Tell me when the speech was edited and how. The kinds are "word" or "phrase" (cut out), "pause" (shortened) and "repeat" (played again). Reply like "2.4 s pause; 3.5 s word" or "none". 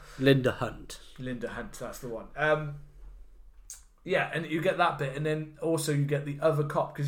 none